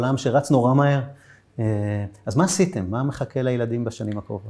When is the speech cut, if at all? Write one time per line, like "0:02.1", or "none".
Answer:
none